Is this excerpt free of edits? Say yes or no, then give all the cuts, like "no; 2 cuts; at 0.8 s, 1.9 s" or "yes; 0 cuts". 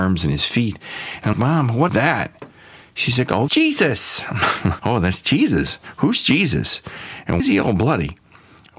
no; 5 cuts; at 1.3 s, 1.9 s, 3.5 s, 4.8 s, 7.4 s